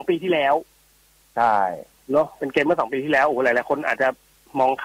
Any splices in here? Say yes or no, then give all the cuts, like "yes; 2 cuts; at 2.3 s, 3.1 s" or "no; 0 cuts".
no; 0 cuts